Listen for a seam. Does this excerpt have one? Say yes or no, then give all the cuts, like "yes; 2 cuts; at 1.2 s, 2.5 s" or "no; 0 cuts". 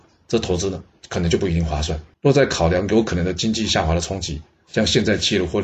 yes; 1 cut; at 2.1 s